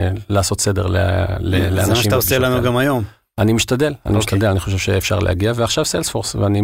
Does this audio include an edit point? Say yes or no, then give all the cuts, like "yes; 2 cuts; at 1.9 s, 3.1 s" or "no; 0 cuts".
no; 0 cuts